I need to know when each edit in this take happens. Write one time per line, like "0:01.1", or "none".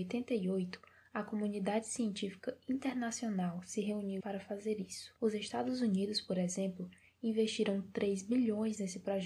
0:04.2
0:05.2